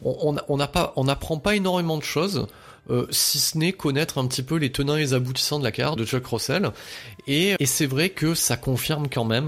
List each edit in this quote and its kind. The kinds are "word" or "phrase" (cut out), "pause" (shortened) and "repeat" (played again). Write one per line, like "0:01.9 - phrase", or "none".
0:06.0 - word
0:07.6 - word